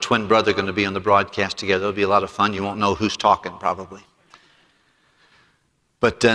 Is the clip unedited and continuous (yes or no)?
yes